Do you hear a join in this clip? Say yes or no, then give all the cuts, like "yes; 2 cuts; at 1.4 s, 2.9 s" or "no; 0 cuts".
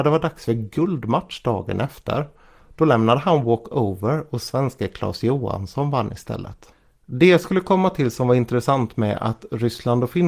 no; 0 cuts